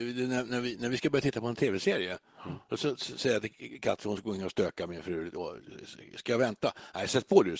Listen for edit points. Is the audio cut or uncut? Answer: uncut